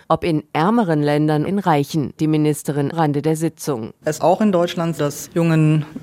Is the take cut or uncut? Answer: cut